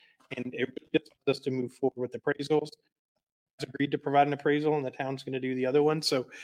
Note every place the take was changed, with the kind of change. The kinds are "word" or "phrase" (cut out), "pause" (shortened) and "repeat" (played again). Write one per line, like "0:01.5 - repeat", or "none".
0:01.2 - pause
0:03.6 - word